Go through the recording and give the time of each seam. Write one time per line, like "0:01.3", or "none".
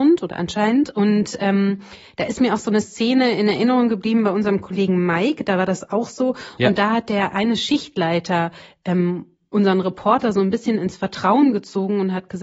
none